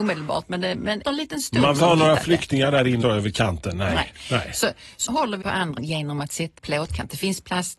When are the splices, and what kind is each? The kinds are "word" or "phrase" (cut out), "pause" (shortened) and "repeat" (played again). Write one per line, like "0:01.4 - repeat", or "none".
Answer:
0:01.0 - word
0:01.8 - word
0:03.0 - word
0:05.1 - word
0:05.4 - word
0:05.8 - word
0:06.6 - word